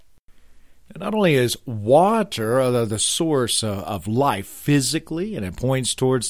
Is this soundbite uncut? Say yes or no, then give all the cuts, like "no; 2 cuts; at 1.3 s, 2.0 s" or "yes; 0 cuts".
yes; 0 cuts